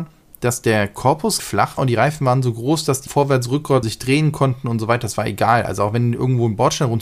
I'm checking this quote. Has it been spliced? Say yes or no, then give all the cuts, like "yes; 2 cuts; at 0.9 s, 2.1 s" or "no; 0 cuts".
yes; 4 cuts; at 1.4 s, 1.8 s, 3.1 s, 3.8 s